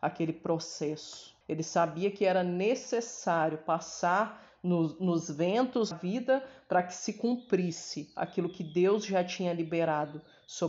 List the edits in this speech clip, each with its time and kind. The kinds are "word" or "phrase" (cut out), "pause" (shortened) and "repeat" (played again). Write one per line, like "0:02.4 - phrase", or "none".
0:01.4 - pause
0:05.9 - phrase